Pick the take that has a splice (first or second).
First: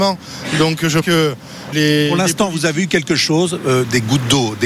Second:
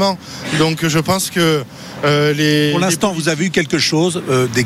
first